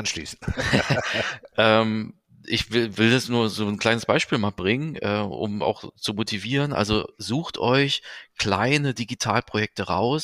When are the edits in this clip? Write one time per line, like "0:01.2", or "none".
none